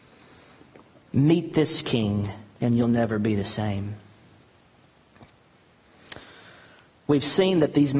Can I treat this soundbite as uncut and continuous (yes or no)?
yes